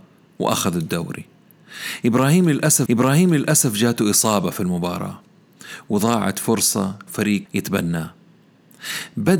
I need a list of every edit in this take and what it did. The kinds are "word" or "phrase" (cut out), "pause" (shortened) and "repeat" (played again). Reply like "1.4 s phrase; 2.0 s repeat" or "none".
2.9 s repeat; 7.1 s word; 7.5 s word